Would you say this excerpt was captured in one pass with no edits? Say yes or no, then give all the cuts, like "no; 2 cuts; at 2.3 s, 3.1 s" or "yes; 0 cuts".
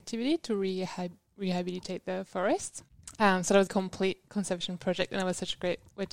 no; 1 cut; at 3.7 s